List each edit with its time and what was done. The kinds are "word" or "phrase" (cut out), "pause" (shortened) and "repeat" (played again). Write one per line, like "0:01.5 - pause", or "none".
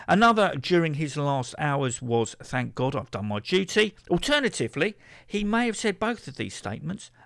0:04.0 - pause